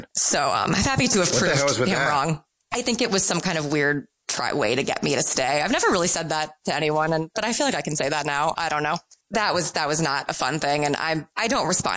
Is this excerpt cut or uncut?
uncut